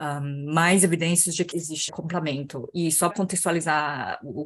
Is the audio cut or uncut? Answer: cut